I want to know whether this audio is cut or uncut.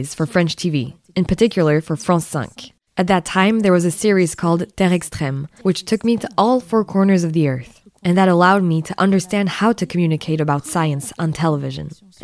uncut